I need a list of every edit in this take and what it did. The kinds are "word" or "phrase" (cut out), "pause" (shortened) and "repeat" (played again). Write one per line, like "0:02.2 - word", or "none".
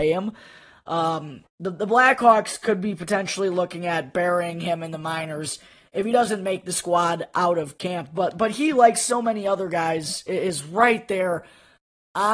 0:01.5 - pause